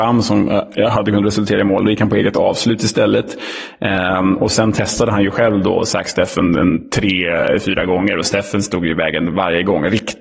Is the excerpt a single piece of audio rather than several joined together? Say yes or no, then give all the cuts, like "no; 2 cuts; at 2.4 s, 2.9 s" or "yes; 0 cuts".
yes; 0 cuts